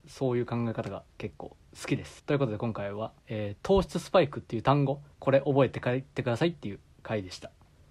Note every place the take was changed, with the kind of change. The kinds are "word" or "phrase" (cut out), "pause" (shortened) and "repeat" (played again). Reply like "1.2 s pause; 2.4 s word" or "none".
1.1 s pause; 2.2 s pause; 3.2 s pause